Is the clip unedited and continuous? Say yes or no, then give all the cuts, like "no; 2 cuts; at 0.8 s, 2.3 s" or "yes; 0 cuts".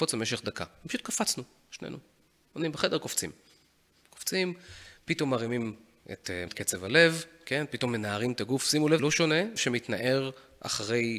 no; 3 cuts; at 6.5 s, 9.0 s, 9.6 s